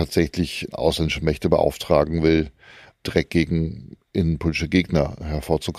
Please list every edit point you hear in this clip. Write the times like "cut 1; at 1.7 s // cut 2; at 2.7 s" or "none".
none